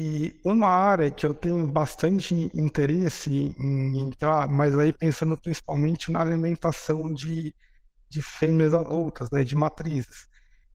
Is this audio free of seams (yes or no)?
yes